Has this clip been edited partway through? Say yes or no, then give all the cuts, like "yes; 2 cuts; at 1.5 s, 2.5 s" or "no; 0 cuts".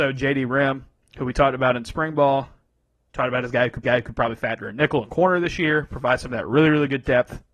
yes; 1 cut; at 3.8 s